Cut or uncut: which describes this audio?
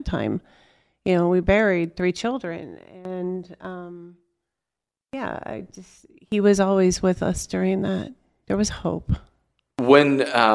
cut